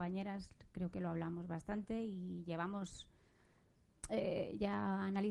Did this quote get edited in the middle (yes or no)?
no